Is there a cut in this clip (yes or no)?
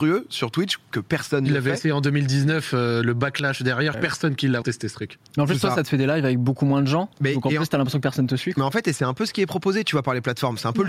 yes